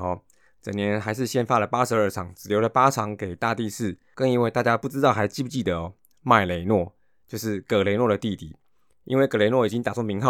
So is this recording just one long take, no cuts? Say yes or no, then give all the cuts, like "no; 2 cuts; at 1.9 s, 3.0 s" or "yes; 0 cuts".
yes; 0 cuts